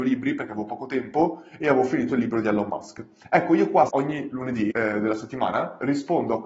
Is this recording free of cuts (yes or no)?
no